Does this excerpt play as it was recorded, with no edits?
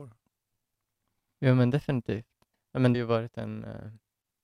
no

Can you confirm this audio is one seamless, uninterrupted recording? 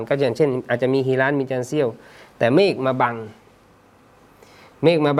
yes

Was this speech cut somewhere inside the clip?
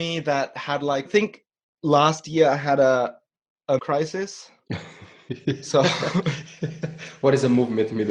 yes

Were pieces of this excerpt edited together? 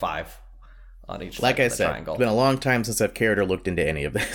no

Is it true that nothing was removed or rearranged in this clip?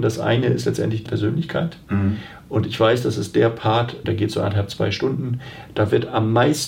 no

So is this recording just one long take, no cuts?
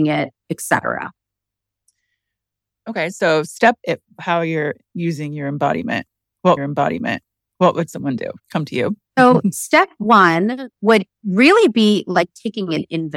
no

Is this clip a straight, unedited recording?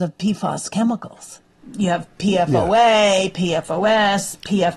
yes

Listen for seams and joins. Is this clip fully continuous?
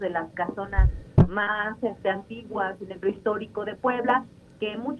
no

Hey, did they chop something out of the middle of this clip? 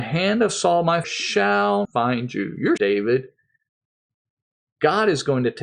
yes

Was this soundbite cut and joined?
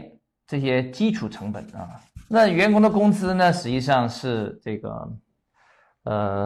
yes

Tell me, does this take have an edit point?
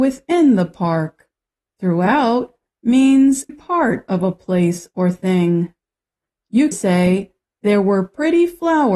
yes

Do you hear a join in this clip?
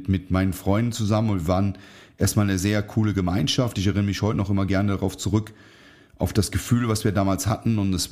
no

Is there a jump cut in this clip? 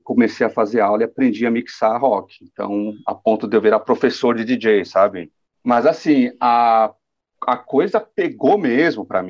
no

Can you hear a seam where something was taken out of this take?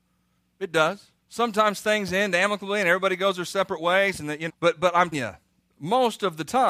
yes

